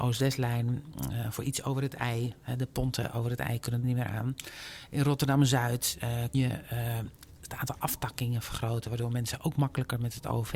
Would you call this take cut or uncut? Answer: cut